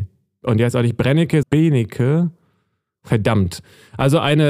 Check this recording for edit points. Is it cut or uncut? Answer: cut